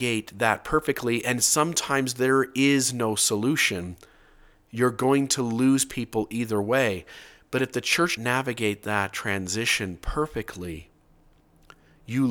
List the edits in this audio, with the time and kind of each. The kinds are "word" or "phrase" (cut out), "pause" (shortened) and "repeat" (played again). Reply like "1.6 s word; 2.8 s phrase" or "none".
8.2 s word

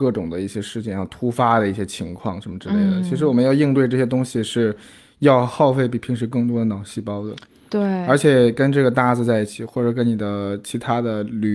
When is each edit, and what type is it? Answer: none

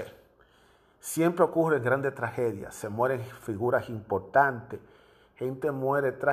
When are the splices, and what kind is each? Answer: none

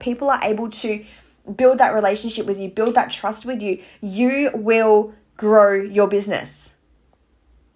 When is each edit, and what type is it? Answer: none

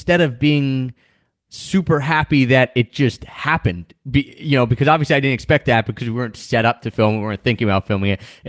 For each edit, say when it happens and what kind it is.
none

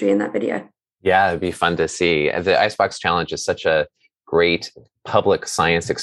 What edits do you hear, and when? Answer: none

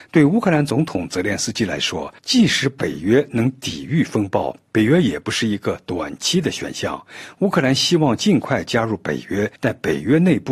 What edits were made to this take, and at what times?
2.2 s pause; 9.6 s pause

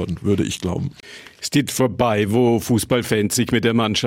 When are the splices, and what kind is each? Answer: 1.7 s word

